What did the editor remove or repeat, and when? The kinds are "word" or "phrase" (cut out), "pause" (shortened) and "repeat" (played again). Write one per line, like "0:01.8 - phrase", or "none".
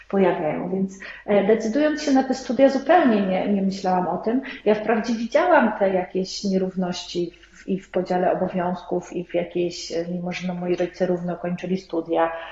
none